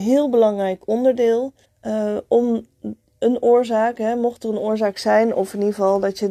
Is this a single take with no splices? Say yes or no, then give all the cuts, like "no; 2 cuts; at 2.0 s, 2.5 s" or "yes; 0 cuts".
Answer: no; 1 cut; at 1.6 s